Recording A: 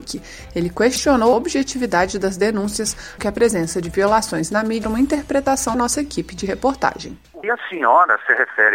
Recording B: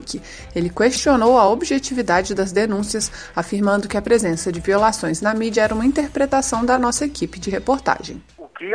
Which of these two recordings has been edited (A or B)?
A